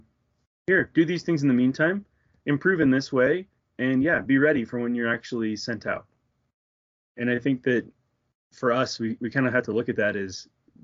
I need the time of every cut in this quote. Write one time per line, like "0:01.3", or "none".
none

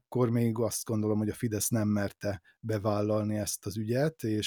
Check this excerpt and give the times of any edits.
none

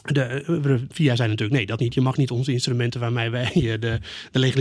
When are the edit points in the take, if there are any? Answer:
0:01.8

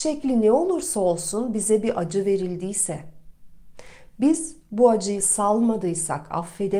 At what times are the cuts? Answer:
none

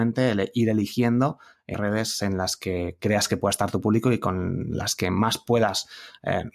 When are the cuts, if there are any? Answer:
0:01.7

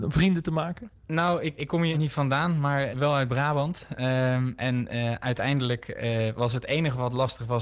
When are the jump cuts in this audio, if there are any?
0:01.6
0:01.9
0:02.9

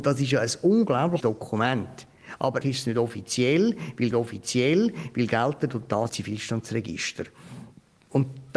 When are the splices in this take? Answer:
0:01.2
0:02.6
0:04.1
0:06.1

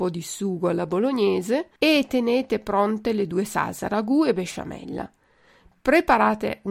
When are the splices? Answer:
0:01.8

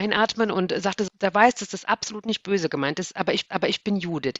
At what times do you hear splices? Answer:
0:01.1
0:03.5

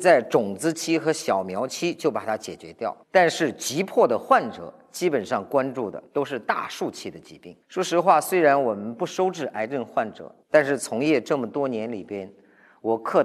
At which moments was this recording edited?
0:03.0
0:06.1
0:07.6
0:10.4

